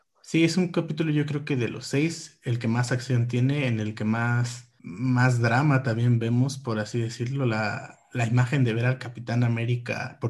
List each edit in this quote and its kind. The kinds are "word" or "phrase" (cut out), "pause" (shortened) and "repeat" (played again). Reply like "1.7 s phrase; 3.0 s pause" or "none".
4.8 s pause